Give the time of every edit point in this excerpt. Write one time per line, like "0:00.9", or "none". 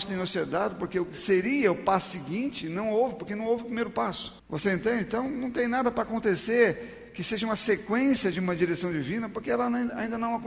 0:04.4